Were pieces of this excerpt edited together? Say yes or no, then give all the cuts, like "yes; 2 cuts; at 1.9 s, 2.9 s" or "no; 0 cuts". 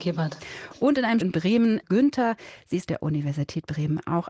yes; 3 cuts; at 1.2 s, 1.8 s, 2.9 s